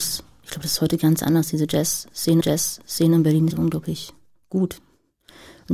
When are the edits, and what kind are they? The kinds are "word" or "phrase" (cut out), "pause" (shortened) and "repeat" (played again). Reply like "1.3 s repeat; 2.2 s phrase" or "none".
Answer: 2.4 s repeat; 3.5 s phrase